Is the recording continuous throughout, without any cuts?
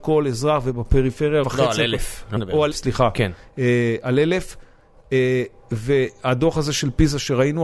no; 3 cuts; at 1.4 s, 2.4 s, 2.7 s

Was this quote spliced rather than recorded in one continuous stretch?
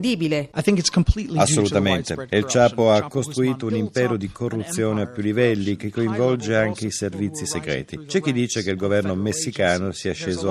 no; 0 cuts

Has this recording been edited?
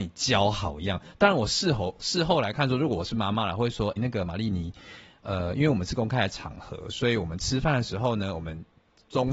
yes; 1 cut; at 4.0 s

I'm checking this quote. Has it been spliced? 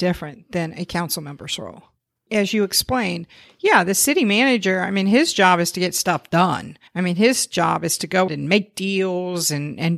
yes; 2 cuts; at 6.9 s, 8.3 s

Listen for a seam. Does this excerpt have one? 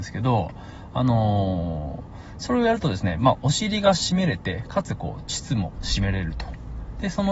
no; 0 cuts

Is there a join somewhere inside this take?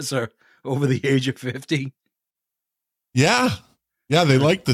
no; 0 cuts

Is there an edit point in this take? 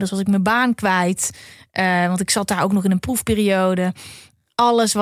no; 0 cuts

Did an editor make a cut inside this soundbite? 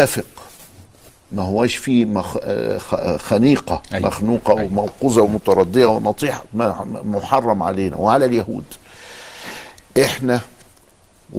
no; 0 cuts

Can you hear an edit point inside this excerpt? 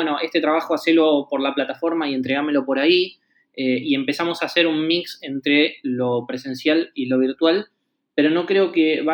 no; 0 cuts

